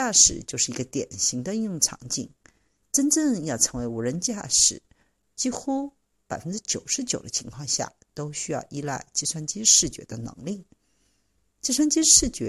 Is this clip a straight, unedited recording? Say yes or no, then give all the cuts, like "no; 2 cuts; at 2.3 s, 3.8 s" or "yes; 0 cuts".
yes; 0 cuts